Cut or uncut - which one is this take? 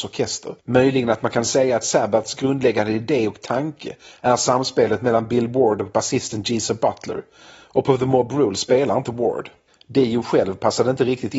uncut